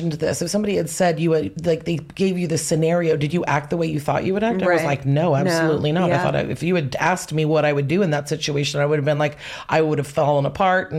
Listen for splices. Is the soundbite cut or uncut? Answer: uncut